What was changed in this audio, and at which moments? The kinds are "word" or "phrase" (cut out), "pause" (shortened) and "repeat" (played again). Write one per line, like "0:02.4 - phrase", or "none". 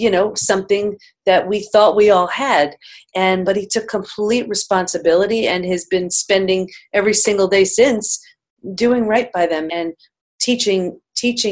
0:03.4 - word
0:09.7 - word

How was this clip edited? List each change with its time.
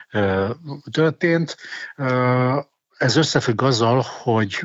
none

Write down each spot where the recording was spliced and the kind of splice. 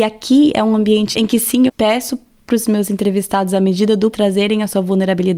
0:01.7 - word
0:04.1 - word

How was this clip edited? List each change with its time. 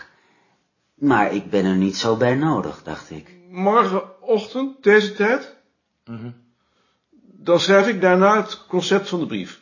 none

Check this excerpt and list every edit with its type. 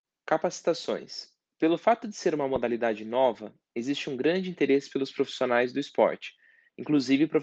none

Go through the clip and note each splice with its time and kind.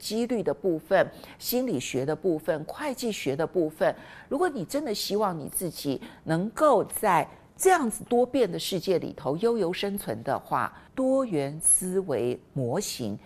0:10.9 - pause

